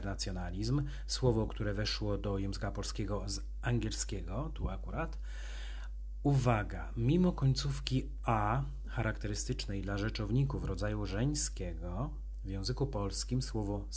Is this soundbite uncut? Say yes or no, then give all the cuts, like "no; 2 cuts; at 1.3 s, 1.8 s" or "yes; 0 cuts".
yes; 0 cuts